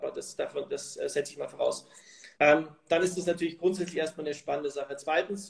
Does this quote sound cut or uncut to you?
cut